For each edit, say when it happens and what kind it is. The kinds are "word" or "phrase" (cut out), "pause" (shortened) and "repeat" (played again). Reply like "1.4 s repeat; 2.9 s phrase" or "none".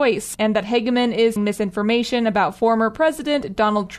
1.4 s word

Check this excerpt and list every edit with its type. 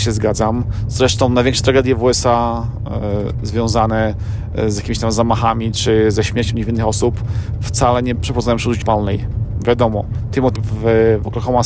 8.2 s word; 8.8 s word; 10.6 s word

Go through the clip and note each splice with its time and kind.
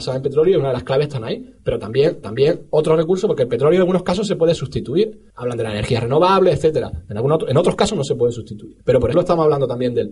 2.2 s repeat; 5.3 s pause; 8.8 s pause; 9.1 s word

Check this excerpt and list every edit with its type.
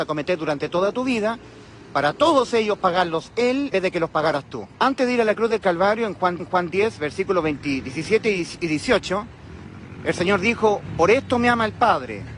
3.7 s word; 4.7 s pause; 6.4 s repeat

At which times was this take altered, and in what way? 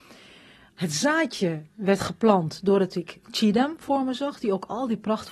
none

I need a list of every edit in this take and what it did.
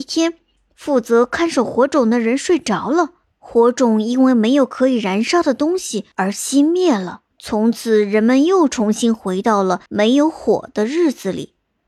3.2 s pause; 6.1 s pause; 7.3 s pause; 9.9 s pause

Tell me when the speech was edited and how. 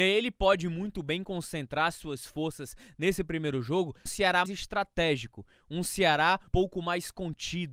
4.1 s word; 4.5 s word; 6.5 s word

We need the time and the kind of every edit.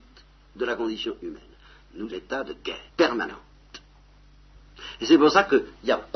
2.1 s phrase; 2.9 s pause

